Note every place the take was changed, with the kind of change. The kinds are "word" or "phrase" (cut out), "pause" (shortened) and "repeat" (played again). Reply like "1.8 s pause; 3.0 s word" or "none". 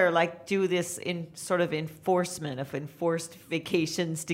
none